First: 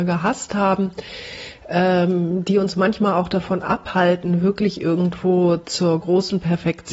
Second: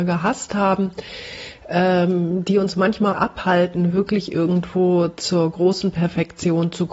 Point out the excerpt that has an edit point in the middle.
second; 1 cut; at 3.1 s

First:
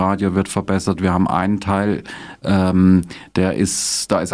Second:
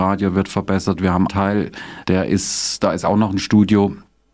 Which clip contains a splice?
second; 2 cuts; at 1.3 s, 2.0 s

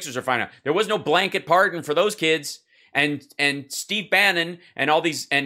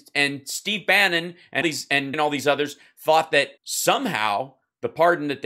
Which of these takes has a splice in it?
second; 3 cuts; at 1.6 s, 2.1 s, 3.6 s

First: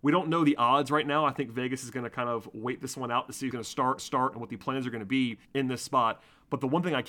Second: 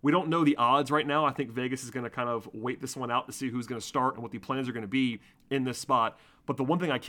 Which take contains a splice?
first; 3 cuts; at 3.5 s, 4.0 s, 5.4 s

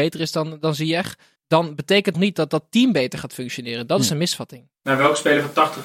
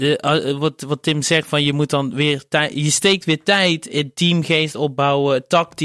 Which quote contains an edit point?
first; 2 cuts; at 1.4 s, 2.1 s

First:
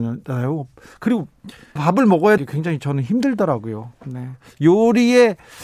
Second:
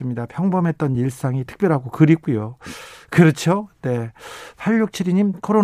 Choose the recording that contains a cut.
first; 2 cuts; at 1.8 s, 2.4 s

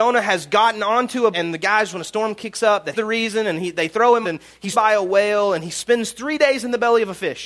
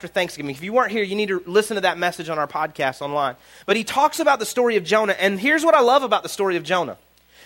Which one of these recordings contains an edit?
first; 5 cuts; at 1.3 s, 1.9 s, 2.9 s, 4.2 s, 4.7 s

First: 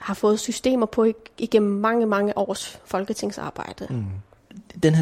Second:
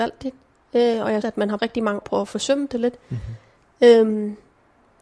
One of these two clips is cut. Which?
second; 3 cuts; at 1.2 s, 1.6 s, 2.0 s

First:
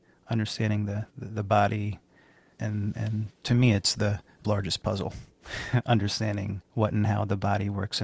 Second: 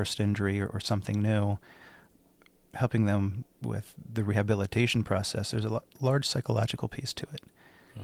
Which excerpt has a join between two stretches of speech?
first; 3 cuts; at 2.6 s, 4.4 s, 6.6 s

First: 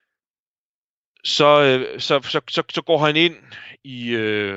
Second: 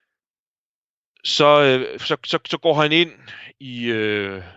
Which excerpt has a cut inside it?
second; 1 cut; at 2.0 s

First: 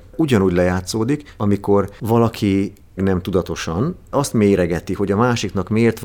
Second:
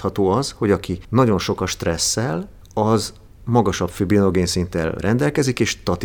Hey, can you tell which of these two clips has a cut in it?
first; 2 cuts; at 3.0 s, 4.1 s

